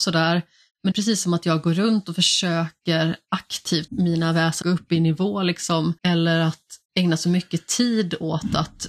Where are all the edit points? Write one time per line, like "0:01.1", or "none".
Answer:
0:00.9
0:03.9
0:04.6
0:06.0
0:06.9